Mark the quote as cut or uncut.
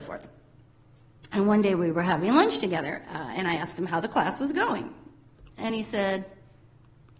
uncut